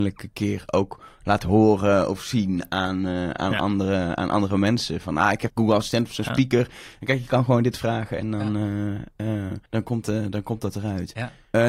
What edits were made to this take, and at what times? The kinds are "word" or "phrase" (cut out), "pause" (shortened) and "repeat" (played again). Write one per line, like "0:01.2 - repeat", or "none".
0:05.5 - word
0:09.7 - pause
0:10.0 - word